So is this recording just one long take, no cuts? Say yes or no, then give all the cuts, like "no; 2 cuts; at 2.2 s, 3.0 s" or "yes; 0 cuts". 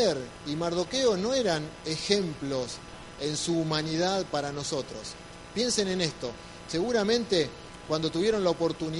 yes; 0 cuts